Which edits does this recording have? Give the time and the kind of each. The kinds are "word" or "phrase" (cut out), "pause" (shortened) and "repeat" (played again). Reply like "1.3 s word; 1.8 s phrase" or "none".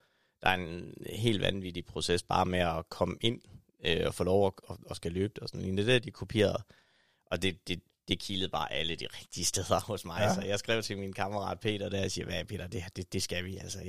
none